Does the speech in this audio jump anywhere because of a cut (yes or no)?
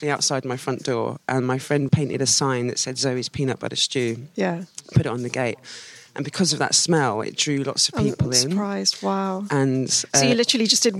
yes